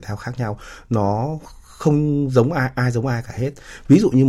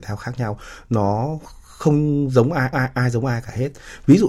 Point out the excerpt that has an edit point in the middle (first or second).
second